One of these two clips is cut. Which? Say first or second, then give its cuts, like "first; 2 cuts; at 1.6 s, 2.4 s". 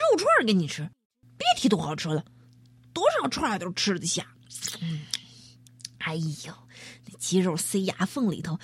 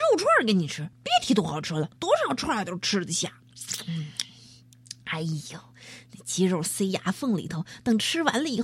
second; 2 cuts; at 0.9 s, 2.0 s